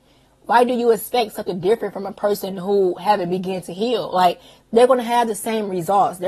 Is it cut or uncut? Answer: uncut